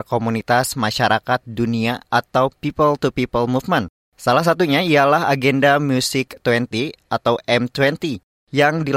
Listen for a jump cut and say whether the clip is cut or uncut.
uncut